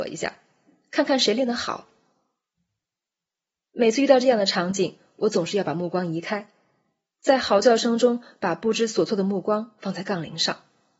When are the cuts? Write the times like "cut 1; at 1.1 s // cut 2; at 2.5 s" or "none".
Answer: none

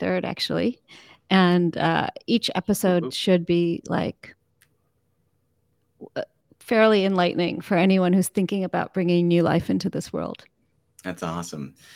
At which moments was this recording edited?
cut 1; at 10.8 s

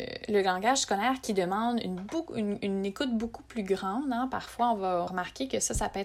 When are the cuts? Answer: cut 1; at 5.1 s

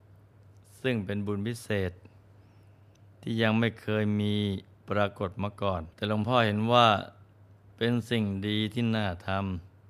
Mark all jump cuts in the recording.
cut 1; at 5.9 s

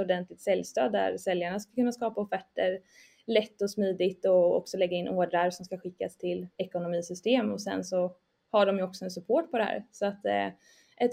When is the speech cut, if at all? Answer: cut 1; at 6.5 s

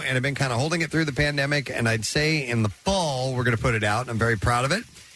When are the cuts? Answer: none

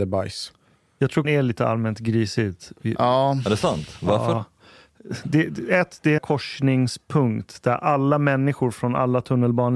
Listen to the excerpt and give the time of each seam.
cut 1; at 1.2 s // cut 2; at 6.2 s

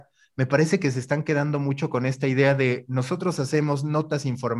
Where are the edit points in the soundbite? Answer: none

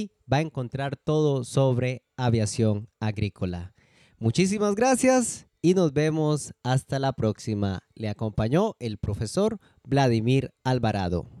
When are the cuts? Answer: none

